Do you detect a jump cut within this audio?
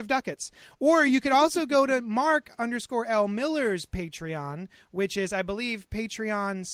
no; 0 cuts

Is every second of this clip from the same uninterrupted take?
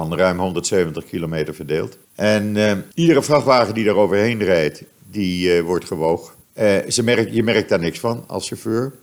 no; 3 cuts; at 2.0 s, 2.9 s, 6.4 s

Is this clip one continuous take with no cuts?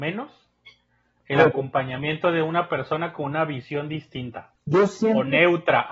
no; 1 cut; at 4.5 s

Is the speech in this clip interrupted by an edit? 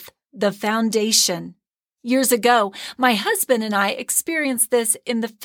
no; 0 cuts

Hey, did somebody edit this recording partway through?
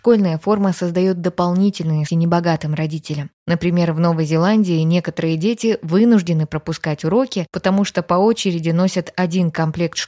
yes; 1 cut; at 2.1 s

